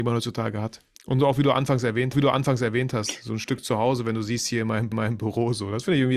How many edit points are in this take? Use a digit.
3